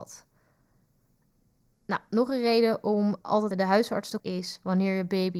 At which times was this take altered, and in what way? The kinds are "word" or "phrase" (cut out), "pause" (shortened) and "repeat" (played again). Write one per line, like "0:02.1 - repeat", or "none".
0:03.5 - word
0:04.2 - word

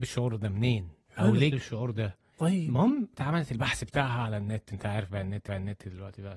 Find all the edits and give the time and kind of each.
0:01.5 - word
0:02.3 - pause
0:03.1 - word
0:05.5 - repeat

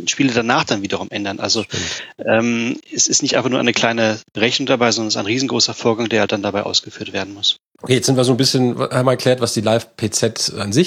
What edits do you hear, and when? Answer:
none

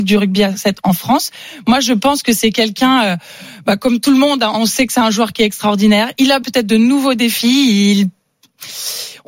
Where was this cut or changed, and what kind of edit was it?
0:06.4 - word

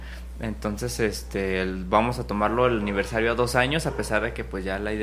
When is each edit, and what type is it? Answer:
none

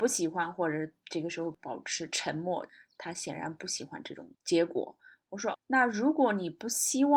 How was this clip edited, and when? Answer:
0:05.5 - word

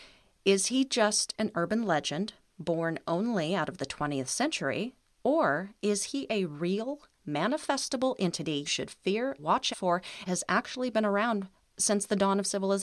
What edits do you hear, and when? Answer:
0:08.7 - word
0:09.4 - word
0:09.7 - word
0:10.3 - word

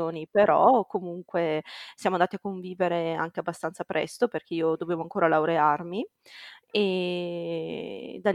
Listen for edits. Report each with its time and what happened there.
none

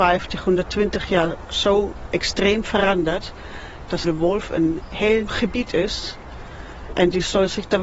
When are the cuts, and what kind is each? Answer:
0:04.0 - phrase
0:05.3 - word

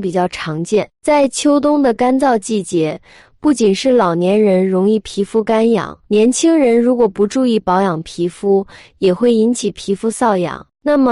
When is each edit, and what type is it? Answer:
0:06.0 - pause

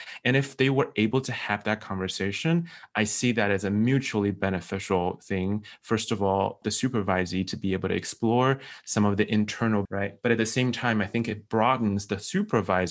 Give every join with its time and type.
0:06.6 - word
0:09.8 - word

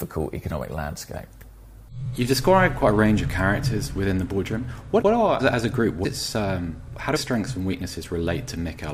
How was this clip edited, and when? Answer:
0:05.0 - word
0:05.4 - word
0:06.0 - word
0:07.2 - word

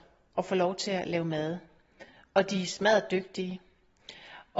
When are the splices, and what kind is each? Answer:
none

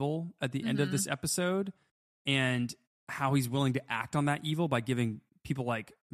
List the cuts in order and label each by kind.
none

